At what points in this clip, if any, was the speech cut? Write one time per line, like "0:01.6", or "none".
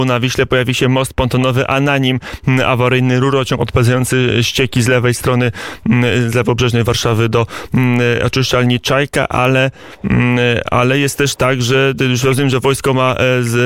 none